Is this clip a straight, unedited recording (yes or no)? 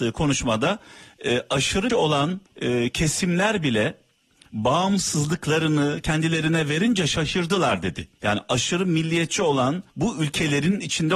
no